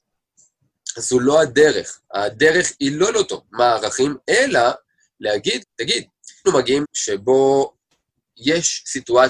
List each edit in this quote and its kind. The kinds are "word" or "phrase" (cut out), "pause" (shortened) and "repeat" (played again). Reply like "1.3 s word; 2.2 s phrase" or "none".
2.0 s pause; 3.1 s word; 5.6 s word; 6.4 s phrase; 6.8 s word